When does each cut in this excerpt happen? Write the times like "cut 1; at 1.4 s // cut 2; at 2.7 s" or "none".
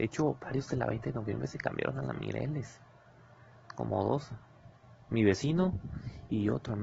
none